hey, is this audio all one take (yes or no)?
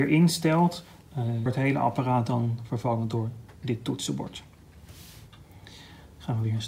no